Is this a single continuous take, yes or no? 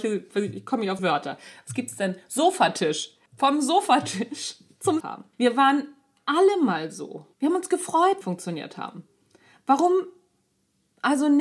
no